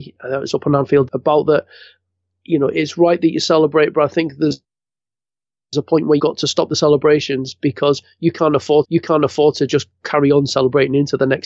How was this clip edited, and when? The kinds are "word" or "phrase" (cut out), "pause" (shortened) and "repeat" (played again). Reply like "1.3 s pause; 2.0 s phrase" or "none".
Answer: 1.1 s word; 6.2 s word; 8.8 s repeat